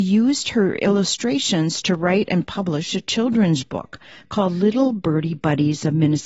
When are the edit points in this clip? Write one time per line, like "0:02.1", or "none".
none